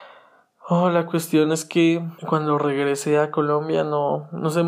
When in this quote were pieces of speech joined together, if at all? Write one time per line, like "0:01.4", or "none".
0:02.2